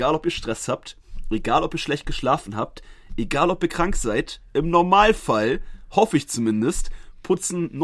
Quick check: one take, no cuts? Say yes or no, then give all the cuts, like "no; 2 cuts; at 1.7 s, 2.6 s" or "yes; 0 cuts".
yes; 0 cuts